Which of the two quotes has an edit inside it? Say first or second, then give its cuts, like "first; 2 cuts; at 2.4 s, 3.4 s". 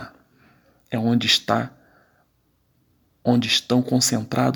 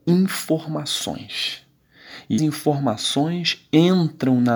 second; 1 cut; at 2.4 s